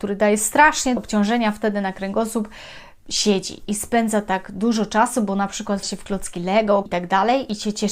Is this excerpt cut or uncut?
cut